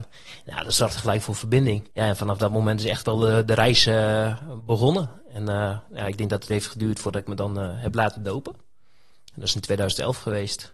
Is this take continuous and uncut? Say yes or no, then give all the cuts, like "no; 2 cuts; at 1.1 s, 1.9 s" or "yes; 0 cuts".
no; 2 cuts; at 1.9 s, 6.5 s